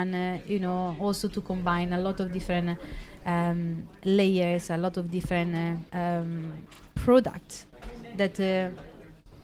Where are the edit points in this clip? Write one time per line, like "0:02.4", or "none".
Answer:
none